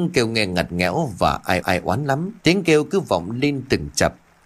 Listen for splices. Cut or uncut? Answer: cut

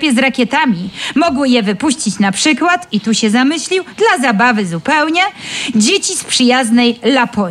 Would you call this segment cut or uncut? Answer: uncut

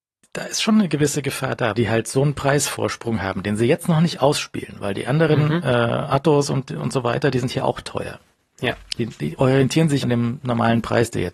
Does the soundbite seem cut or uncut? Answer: cut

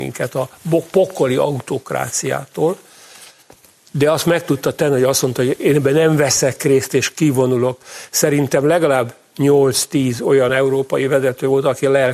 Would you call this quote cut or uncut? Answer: uncut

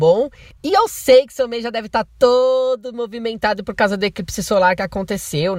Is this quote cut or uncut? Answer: uncut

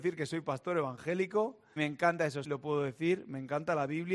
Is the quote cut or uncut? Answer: cut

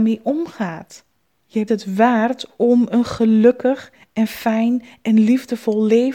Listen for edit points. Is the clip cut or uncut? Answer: cut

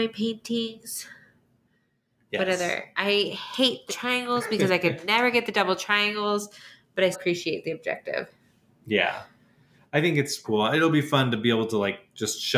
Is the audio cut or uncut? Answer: cut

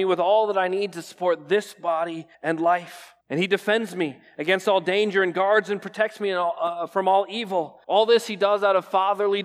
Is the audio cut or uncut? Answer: cut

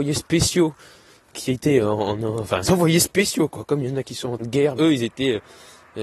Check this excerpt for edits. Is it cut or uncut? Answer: cut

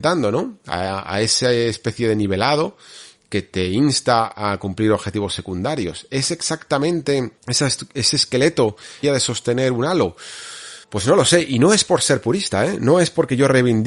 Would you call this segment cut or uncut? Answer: cut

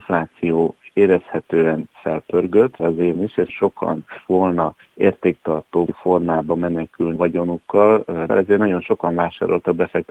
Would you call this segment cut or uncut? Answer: cut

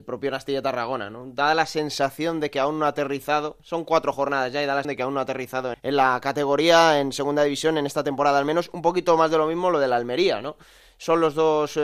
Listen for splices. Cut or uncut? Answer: cut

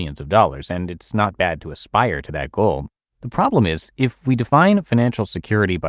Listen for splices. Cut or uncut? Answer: uncut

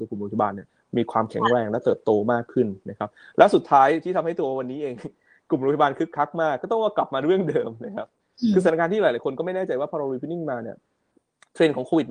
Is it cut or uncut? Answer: uncut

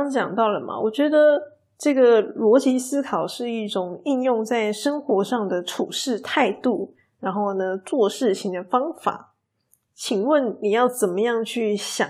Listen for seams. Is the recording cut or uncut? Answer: uncut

